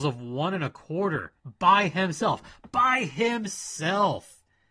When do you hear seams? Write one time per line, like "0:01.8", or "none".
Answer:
0:01.4